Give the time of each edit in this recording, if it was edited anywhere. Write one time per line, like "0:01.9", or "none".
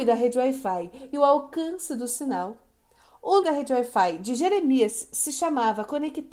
0:03.4